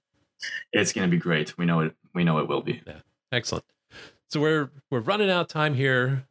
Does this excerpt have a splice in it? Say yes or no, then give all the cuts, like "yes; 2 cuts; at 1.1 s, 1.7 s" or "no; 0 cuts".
no; 0 cuts